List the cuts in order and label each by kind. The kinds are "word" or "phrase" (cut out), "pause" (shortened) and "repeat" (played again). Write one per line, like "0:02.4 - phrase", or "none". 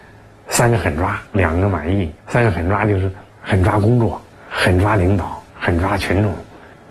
0:01.3 - pause
0:02.2 - pause
0:03.3 - pause
0:04.3 - pause
0:05.5 - pause